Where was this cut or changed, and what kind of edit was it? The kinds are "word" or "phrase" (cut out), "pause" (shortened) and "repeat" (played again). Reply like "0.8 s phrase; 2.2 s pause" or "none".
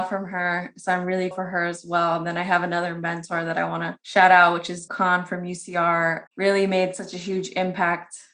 1.3 s word; 4.0 s pause; 4.9 s word; 6.3 s word